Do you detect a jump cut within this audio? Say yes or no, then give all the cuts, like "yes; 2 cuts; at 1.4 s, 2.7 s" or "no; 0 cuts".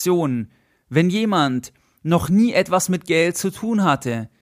no; 0 cuts